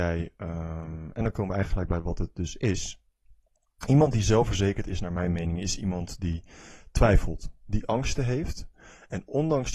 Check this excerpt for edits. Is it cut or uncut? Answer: uncut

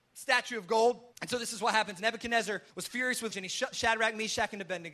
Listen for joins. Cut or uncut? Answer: cut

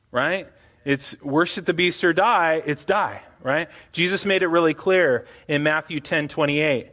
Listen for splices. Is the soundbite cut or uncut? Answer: uncut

